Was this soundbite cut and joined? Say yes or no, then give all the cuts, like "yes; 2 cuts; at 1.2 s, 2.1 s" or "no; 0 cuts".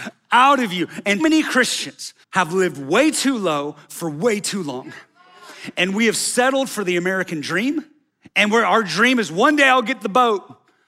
yes; 3 cuts; at 1.2 s, 2.2 s, 8.1 s